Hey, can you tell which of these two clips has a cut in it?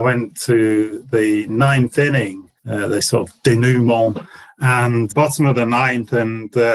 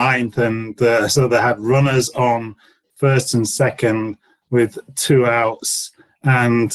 first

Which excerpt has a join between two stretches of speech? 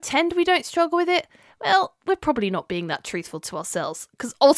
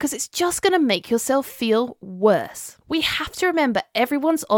second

